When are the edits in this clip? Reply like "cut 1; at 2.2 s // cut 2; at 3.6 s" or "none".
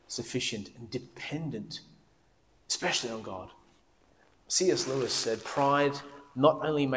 none